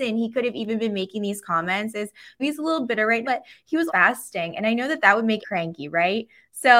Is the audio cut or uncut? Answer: cut